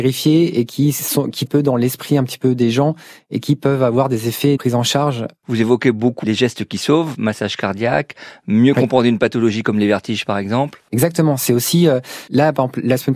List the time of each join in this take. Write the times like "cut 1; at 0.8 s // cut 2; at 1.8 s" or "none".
cut 1; at 1.5 s // cut 2; at 4.6 s // cut 3; at 6.2 s